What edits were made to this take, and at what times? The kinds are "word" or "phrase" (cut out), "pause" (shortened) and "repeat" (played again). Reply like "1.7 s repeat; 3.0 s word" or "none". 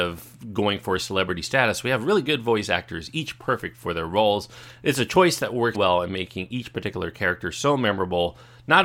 5.7 s word